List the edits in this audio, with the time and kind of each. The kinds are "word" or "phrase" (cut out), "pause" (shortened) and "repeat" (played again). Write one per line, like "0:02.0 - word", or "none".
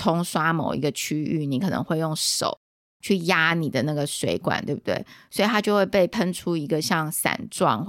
none